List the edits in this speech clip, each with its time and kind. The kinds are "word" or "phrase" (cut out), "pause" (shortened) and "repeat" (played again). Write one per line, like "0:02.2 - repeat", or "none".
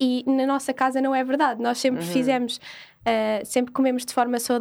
none